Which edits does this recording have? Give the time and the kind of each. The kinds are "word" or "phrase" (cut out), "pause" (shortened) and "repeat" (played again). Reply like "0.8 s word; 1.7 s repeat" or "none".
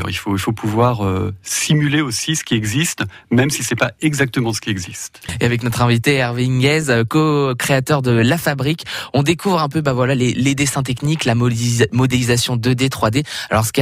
none

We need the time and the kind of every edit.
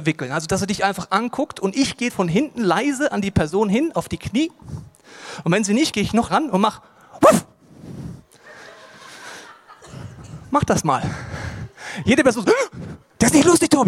2.1 s word; 5.9 s word; 6.3 s word

